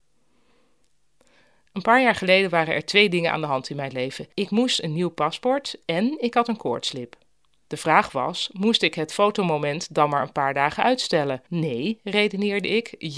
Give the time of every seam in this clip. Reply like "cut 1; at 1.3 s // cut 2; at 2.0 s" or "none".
cut 1; at 4.3 s // cut 2; at 11.5 s

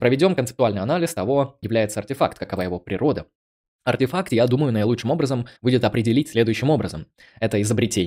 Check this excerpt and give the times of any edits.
cut 1; at 1.6 s // cut 2; at 5.6 s

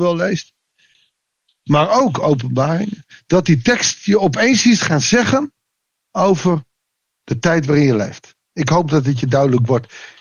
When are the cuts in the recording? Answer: none

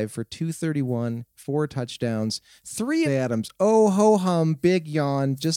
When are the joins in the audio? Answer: cut 1; at 1.3 s // cut 2; at 3.0 s

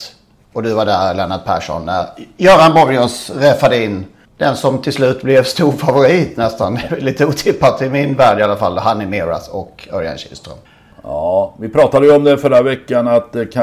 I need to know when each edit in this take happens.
none

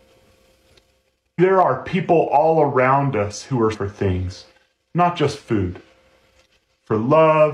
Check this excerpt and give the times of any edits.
cut 1; at 1.4 s // cut 2; at 3.7 s

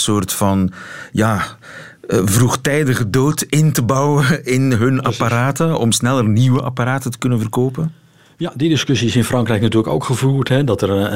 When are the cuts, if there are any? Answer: none

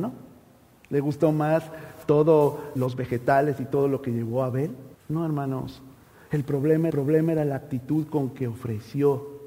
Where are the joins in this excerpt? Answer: cut 1; at 2.8 s // cut 2; at 4.9 s // cut 3; at 6.0 s // cut 4; at 6.9 s

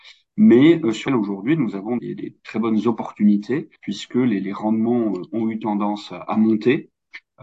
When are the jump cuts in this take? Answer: cut 1; at 1.1 s // cut 2; at 2.0 s // cut 3; at 3.8 s

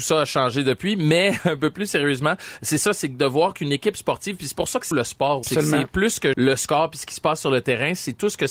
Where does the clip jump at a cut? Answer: cut 1; at 4.9 s // cut 2; at 5.4 s // cut 3; at 6.3 s

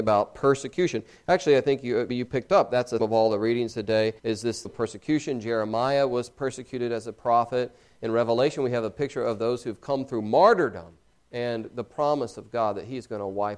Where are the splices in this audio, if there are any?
cut 1; at 2.1 s // cut 2; at 3.0 s // cut 3; at 4.2 s // cut 4; at 4.6 s // cut 5; at 11.0 s

